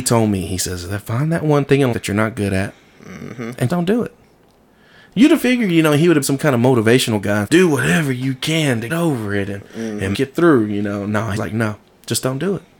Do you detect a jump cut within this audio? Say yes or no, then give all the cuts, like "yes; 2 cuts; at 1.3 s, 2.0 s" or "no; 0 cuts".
yes; 7 cuts; at 1.9 s, 3.7 s, 6.2 s, 7.5 s, 8.9 s, 10.1 s, 11.4 s